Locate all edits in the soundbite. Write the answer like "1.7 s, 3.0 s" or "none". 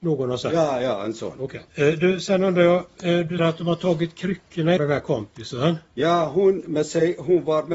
1.7 s, 3.4 s, 4.8 s